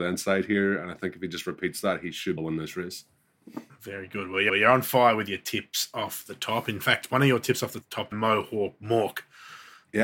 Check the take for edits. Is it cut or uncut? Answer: cut